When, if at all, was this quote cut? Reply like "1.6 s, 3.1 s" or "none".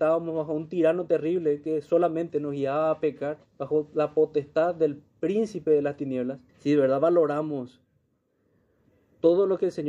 3.5 s, 5.1 s, 6.5 s